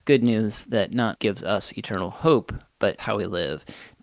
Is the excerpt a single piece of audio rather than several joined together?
no; 2 cuts; at 1.2 s, 3.0 s

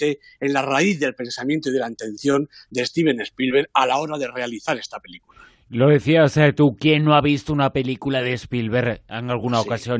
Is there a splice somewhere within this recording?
no; 0 cuts

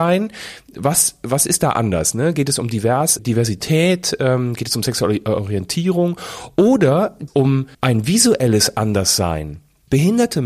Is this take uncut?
no; 3 cuts; at 3.2 s, 7.3 s, 7.7 s

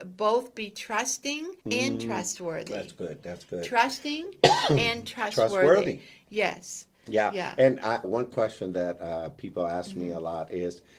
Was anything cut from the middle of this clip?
yes; 2 cuts; at 1.6 s, 8.0 s

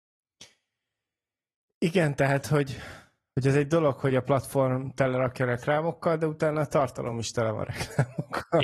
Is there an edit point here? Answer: no; 0 cuts

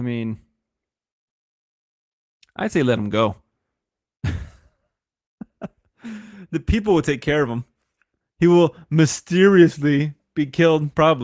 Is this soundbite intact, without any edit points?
yes; 0 cuts

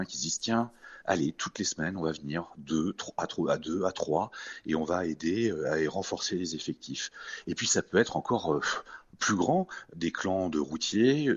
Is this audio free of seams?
yes; 0 cuts

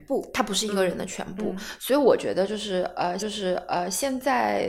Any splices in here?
yes; 1 cut; at 3.2 s

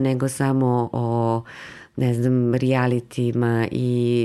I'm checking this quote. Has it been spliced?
no; 0 cuts

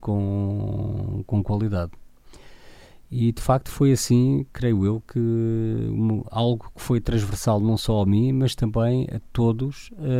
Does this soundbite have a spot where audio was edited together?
no; 0 cuts

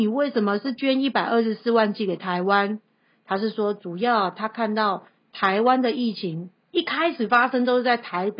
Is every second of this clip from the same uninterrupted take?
yes; 0 cuts

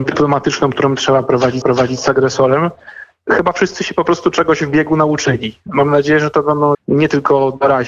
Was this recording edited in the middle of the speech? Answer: yes; 2 cuts; at 1.6 s, 6.7 s

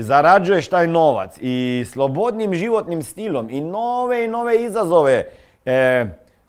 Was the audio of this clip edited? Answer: no; 0 cuts

